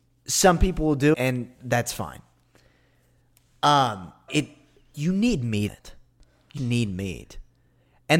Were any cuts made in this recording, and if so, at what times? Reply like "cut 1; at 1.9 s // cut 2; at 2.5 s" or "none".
cut 1; at 1.1 s // cut 2; at 4.3 s // cut 3; at 4.9 s // cut 4; at 5.7 s // cut 5; at 6.6 s